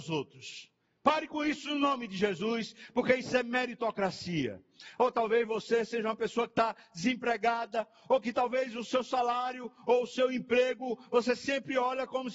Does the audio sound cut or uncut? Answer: uncut